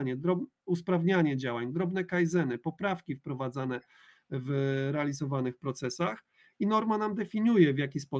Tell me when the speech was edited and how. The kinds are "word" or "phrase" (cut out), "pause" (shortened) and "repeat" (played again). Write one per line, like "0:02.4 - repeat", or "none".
none